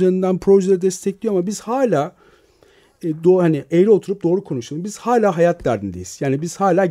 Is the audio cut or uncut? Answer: uncut